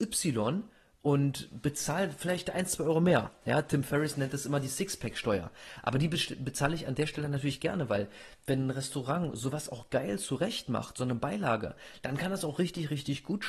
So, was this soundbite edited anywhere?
no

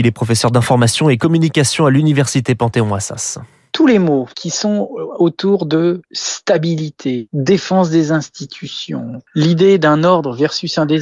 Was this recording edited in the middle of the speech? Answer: no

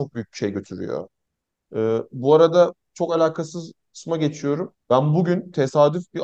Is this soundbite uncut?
no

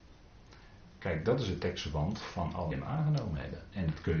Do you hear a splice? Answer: yes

